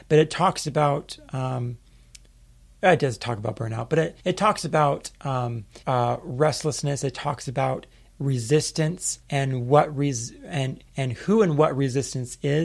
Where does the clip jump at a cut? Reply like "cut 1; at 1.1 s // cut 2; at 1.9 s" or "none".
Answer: cut 1; at 4.2 s // cut 2; at 5.8 s // cut 3; at 9.2 s // cut 4; at 10.9 s